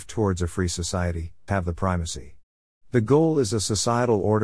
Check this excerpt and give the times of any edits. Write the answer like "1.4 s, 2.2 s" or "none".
1.5 s